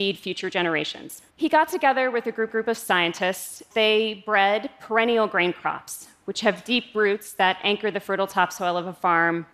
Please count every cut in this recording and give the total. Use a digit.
3